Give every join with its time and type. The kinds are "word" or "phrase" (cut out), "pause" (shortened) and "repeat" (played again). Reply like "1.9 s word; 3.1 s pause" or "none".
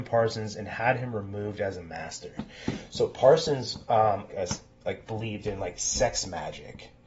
4.3 s phrase